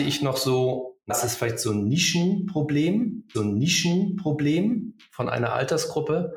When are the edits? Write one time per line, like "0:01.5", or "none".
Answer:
0:01.1
0:03.3